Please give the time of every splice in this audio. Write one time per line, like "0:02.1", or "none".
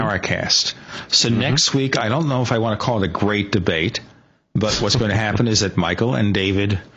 none